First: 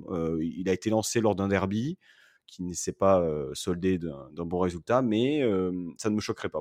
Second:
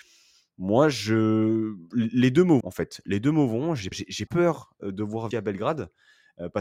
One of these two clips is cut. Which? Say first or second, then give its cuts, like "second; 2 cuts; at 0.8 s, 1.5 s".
second; 4 cuts; at 2.6 s, 3.9 s, 4.3 s, 5.3 s